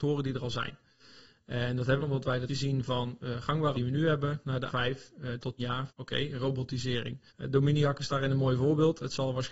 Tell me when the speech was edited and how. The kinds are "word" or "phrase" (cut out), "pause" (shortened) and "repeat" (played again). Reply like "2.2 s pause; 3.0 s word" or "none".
2.0 s phrase; 2.5 s word; 3.7 s word; 4.7 s word; 5.6 s word; 5.9 s word; 7.3 s pause